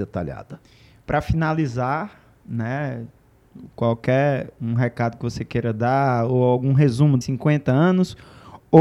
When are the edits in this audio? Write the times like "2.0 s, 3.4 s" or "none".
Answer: 7.2 s